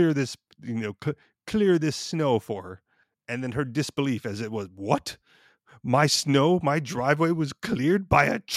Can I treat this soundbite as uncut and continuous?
yes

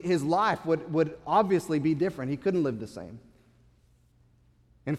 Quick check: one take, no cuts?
yes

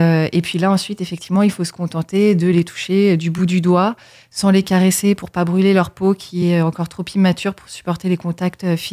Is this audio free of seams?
yes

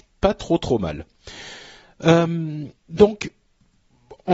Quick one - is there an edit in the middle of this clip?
yes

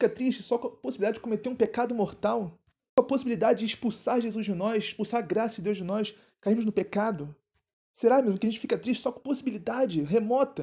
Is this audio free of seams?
no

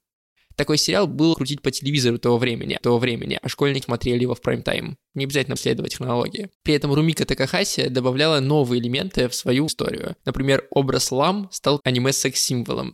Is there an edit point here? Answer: yes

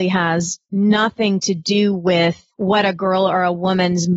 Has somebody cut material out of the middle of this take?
yes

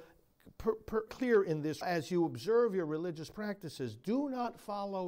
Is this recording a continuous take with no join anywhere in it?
no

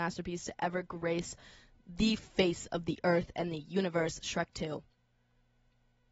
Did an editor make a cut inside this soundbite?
no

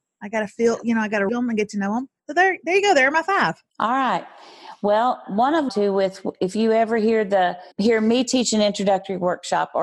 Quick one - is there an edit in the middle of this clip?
yes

